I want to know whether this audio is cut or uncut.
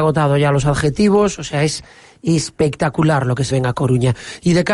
cut